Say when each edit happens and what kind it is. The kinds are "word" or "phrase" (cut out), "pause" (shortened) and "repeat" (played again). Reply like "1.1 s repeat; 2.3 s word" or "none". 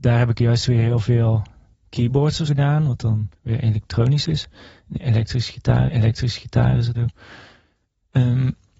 1.7 s word; 2.5 s word; 3.4 s pause; 5.9 s repeat; 6.9 s phrase

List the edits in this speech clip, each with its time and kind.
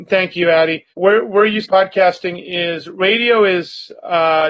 0.9 s pause; 1.6 s word

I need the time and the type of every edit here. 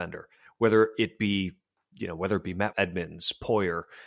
2.7 s word

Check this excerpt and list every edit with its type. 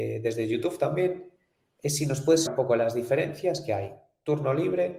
2.5 s word

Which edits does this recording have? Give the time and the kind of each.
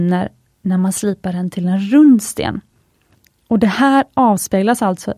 none

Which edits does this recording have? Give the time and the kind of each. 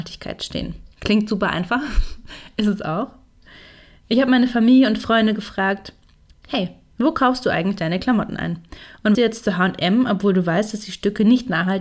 0.9 s pause; 9.1 s phrase

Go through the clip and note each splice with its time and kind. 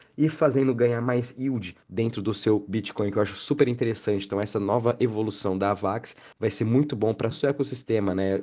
1.8 s pause; 6.3 s pause; 7.3 s word

